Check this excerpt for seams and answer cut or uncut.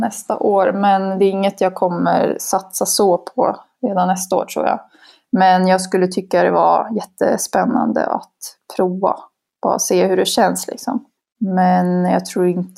uncut